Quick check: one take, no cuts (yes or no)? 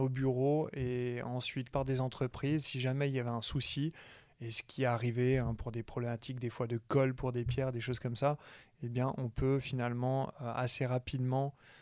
no